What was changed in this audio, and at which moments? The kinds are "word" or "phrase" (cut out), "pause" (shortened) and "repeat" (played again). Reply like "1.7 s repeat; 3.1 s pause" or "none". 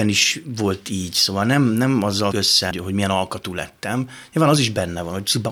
2.3 s word; 2.7 s word